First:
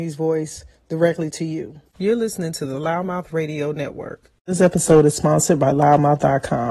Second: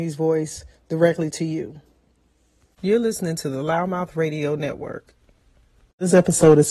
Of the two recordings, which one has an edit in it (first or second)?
first